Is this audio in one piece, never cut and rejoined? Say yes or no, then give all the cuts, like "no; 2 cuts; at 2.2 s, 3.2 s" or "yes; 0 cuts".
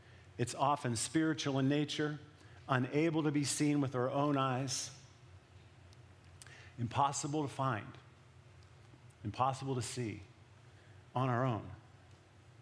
yes; 0 cuts